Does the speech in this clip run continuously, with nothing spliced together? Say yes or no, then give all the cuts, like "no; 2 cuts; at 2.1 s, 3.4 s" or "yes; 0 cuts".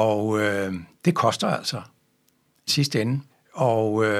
no; 2 cuts; at 2.7 s, 3.3 s